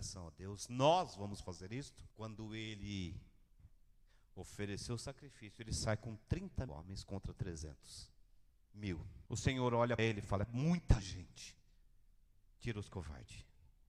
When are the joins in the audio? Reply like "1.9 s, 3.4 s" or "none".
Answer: 2.1 s, 6.7 s, 9.3 s, 10.0 s